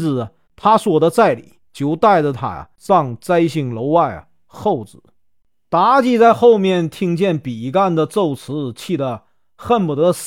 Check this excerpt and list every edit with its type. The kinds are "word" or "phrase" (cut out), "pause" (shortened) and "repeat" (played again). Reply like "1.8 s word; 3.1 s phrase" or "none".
1.7 s pause